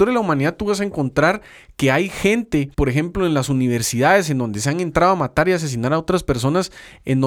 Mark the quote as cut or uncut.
cut